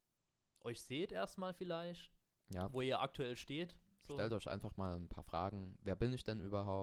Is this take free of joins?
yes; 0 cuts

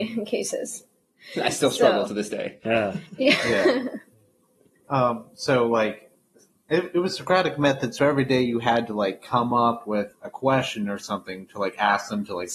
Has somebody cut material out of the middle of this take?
no; 0 cuts

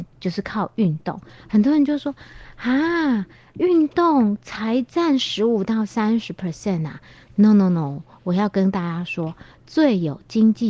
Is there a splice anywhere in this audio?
no; 0 cuts

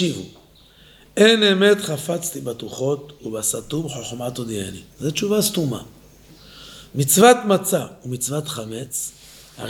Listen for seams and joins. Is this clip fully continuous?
no; 1 cut; at 4.9 s

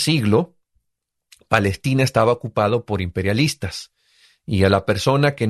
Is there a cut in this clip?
no; 0 cuts

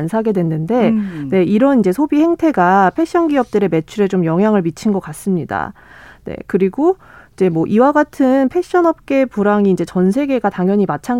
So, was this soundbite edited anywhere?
no; 0 cuts

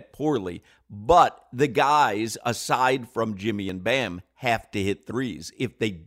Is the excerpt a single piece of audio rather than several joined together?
yes; 0 cuts

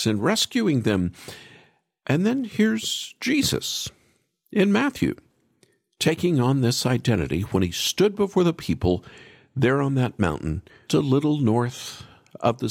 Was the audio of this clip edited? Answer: yes; 1 cut; at 10.9 s

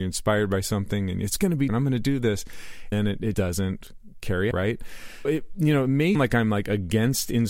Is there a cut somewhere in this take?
yes; 6 cuts; at 1.7 s, 2.9 s, 3.3 s, 4.5 s, 5.2 s, 6.1 s

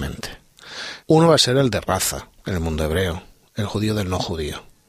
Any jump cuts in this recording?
yes; 2 cuts; at 1.0 s, 2.4 s

